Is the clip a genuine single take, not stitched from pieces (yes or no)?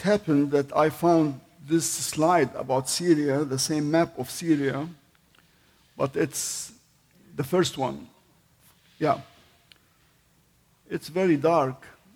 yes